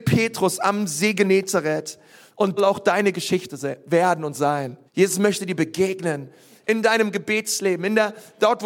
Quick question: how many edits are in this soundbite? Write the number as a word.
two